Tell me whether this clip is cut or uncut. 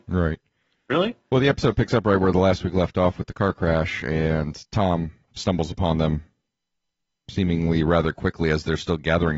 uncut